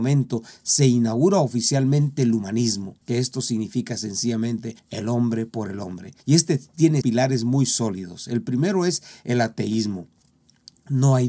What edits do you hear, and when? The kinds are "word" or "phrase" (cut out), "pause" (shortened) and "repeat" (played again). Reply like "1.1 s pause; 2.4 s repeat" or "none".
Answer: 3.0 s pause; 4.8 s pause; 6.2 s pause; 7.0 s word